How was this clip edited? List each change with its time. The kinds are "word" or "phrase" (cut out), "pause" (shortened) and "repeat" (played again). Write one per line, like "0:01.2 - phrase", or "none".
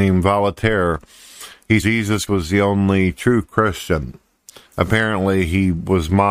0:01.8 - word
0:02.3 - word